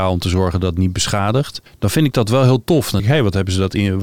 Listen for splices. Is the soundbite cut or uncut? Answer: cut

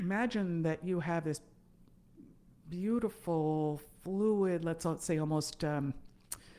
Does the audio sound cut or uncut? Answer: uncut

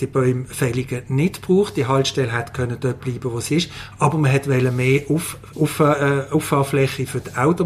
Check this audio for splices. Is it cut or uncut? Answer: cut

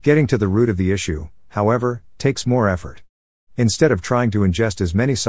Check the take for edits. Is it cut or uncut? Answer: uncut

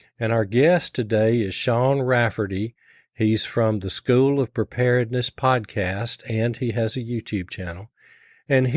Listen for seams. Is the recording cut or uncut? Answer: uncut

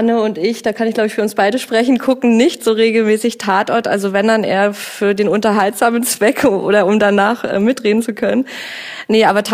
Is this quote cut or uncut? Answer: uncut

